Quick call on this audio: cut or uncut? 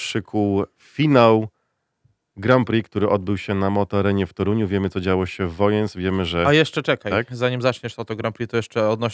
uncut